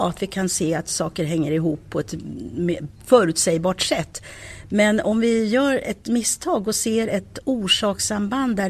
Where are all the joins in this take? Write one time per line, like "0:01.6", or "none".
none